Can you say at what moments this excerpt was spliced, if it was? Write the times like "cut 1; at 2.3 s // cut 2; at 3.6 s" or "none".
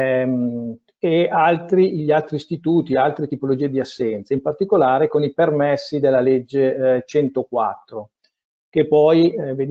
none